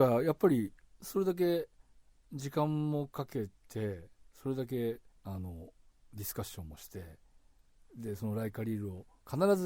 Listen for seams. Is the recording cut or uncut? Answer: cut